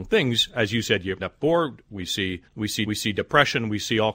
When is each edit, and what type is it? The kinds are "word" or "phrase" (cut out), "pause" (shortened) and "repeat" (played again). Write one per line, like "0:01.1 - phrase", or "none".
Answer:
0:01.2 - word
0:02.5 - pause
0:02.9 - repeat